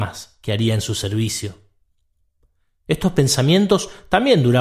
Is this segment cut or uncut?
uncut